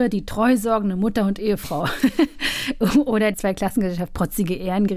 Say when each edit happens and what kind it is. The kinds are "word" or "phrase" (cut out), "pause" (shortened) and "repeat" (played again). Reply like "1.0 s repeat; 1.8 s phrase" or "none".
3.3 s word